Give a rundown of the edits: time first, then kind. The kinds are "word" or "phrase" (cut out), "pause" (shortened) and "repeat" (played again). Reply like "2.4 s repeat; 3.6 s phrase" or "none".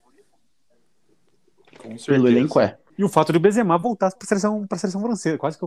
2.9 s pause

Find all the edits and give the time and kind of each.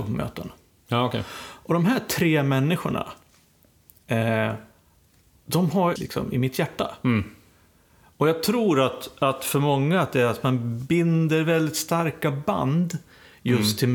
6.0 s phrase

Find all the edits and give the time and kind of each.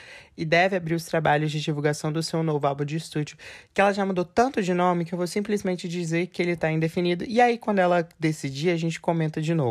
none

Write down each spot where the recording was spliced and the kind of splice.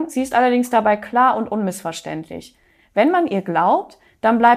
none

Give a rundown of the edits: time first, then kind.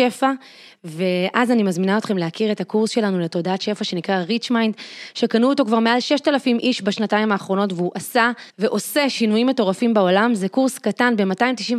8.5 s pause

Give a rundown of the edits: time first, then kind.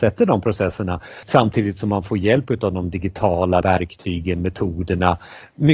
1.2 s word; 3.6 s word

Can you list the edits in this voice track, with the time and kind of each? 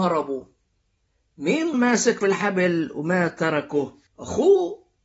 1.7 s word; 2.2 s word; 4.1 s pause

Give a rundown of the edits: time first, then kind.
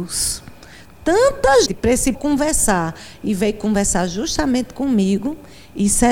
1.7 s word; 2.1 s word

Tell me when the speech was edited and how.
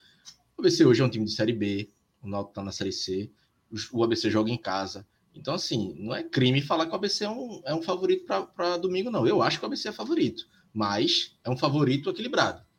none

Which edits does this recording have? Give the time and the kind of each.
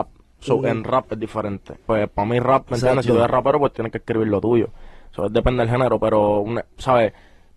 1.8 s pause

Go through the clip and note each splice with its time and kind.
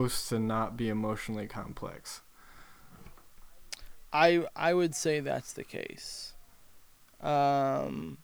none

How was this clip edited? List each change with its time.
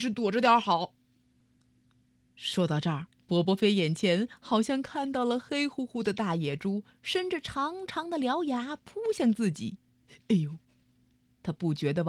3.1 s pause

